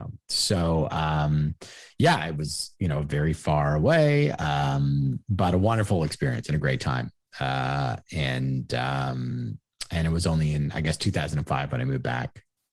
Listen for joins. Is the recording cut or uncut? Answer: uncut